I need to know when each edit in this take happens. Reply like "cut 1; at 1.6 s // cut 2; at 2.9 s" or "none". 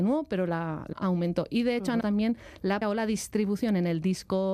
cut 1; at 0.9 s // cut 2; at 2.0 s // cut 3; at 2.8 s